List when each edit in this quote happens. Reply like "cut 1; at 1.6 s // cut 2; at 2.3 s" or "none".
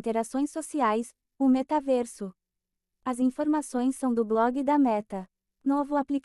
none